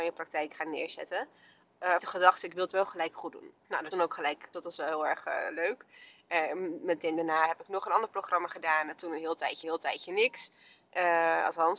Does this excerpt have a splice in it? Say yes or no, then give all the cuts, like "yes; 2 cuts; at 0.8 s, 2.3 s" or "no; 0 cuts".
yes; 5 cuts; at 2.0 s, 3.6 s, 3.9 s, 4.5 s, 9.6 s